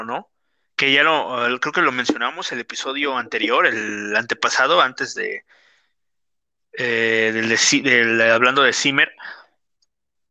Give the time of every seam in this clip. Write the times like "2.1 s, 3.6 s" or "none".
none